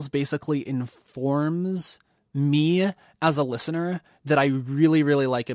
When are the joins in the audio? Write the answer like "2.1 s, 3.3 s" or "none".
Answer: none